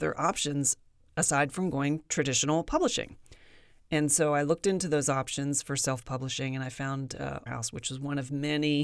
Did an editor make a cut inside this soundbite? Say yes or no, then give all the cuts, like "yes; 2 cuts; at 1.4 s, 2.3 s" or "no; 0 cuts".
yes; 1 cut; at 7.5 s